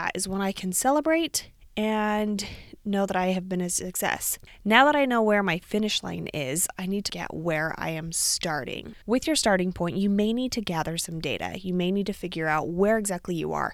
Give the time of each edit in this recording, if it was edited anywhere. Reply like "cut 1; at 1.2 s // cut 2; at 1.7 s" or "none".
cut 1; at 7.1 s // cut 2; at 9.0 s